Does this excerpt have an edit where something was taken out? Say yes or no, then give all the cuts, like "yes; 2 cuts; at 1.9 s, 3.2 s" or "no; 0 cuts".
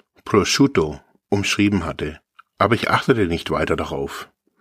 no; 0 cuts